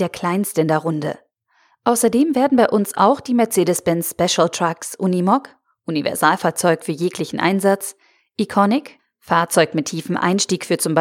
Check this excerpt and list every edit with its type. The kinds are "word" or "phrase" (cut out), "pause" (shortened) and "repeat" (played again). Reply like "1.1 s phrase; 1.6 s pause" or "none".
none